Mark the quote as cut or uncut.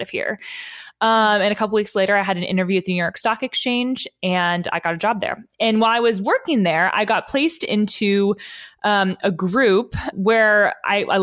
cut